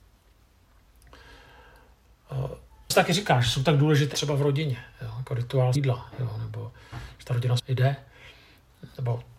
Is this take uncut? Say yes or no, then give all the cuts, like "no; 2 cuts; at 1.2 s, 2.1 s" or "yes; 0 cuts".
no; 4 cuts; at 2.9 s, 4.1 s, 5.8 s, 7.6 s